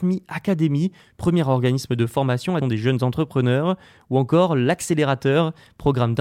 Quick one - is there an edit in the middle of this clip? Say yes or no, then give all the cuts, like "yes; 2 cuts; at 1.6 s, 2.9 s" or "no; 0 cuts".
yes; 1 cut; at 2.6 s